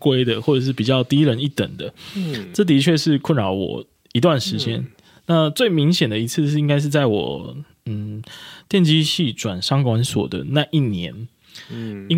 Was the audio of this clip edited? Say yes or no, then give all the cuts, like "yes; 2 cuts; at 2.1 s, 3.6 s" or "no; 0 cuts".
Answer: no; 0 cuts